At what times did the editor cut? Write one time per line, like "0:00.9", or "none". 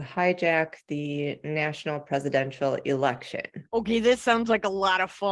0:03.6

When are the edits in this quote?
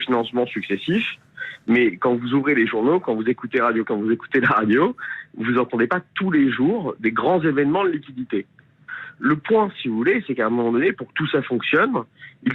0:03.8

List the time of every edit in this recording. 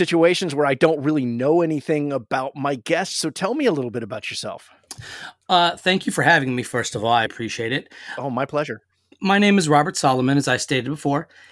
0:07.3

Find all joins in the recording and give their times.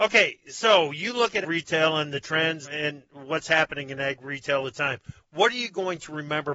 0:01.4
0:02.6
0:04.6

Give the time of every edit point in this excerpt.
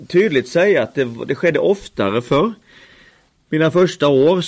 none

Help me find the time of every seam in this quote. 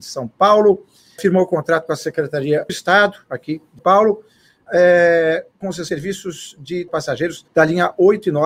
0:01.2
0:02.7
0:03.8
0:04.7
0:05.9
0:06.9
0:07.5

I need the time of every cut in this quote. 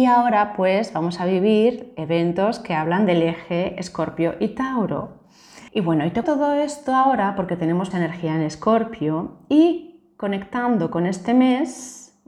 0:05.7
0:06.2
0:07.9

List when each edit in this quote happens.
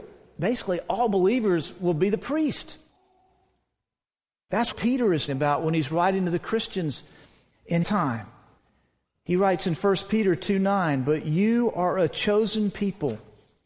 0:04.7
0:05.3
0:07.8

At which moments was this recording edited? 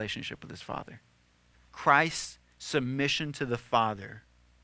0:01.5

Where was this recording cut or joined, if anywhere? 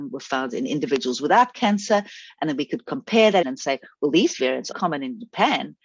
0:03.4
0:04.7

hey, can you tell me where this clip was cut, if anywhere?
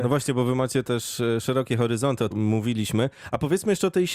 0:02.3

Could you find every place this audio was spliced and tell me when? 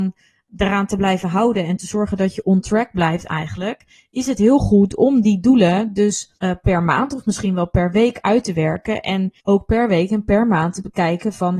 0:06.4
0:09.4

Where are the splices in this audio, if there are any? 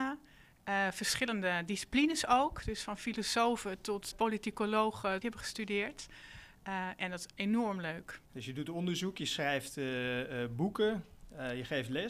0:04.1
0:05.2
0:08.2

